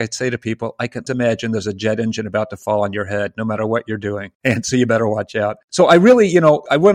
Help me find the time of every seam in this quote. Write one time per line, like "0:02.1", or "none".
0:01.1